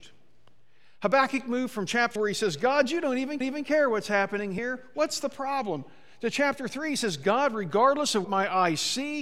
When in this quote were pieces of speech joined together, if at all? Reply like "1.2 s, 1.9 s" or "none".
2.2 s, 3.4 s, 8.2 s